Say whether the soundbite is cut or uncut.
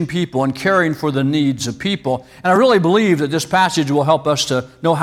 uncut